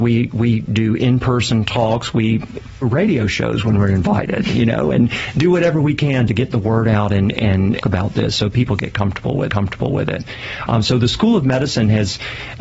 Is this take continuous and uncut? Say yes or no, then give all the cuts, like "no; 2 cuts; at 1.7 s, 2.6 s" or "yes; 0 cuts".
no; 3 cuts; at 2.8 s, 7.8 s, 9.5 s